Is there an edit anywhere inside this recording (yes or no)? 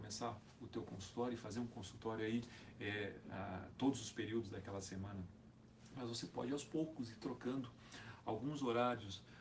no